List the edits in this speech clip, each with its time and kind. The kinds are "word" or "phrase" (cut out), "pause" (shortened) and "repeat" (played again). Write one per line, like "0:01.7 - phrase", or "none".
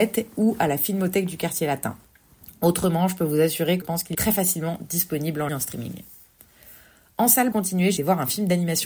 0:03.8 - word
0:04.1 - word
0:05.5 - word
0:07.5 - word
0:08.0 - word